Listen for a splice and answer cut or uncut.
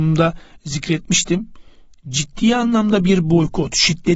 uncut